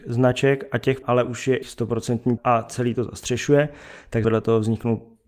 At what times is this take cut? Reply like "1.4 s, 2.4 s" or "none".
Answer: 1.0 s, 1.6 s, 2.4 s, 4.2 s